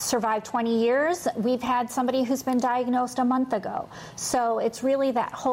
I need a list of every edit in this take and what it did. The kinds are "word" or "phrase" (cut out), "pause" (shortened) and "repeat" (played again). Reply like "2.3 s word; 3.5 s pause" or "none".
none